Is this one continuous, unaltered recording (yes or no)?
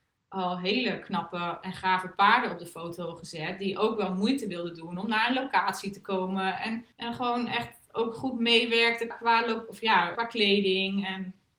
no